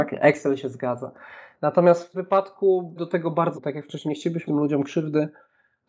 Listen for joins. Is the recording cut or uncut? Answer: cut